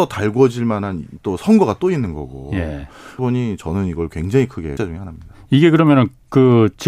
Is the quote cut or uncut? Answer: cut